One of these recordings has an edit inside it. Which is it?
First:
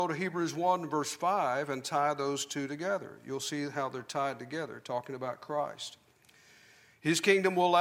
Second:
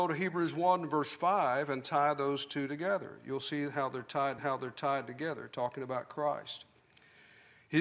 second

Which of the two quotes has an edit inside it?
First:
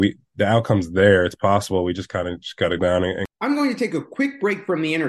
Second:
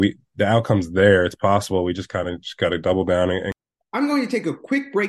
first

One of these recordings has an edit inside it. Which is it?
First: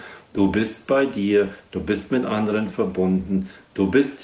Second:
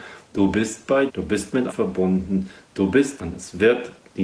second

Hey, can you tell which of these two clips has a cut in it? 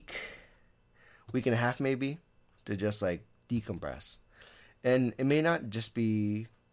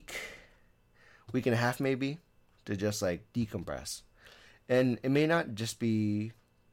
second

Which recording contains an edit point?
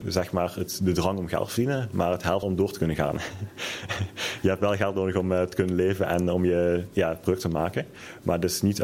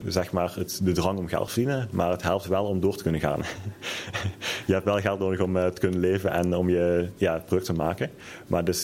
first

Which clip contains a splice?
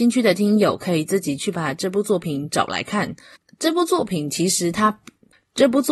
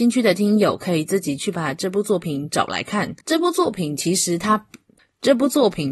second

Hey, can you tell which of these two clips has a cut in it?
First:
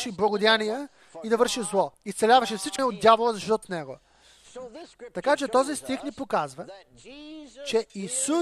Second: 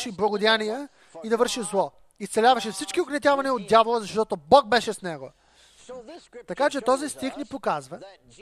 first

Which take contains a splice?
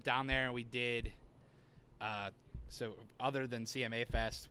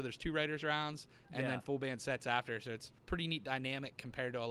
second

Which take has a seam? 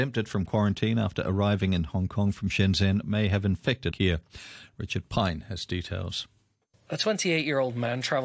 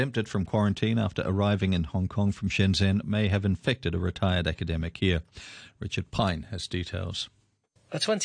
first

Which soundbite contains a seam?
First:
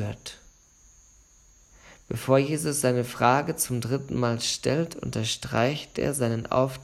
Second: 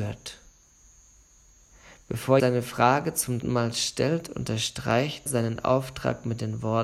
second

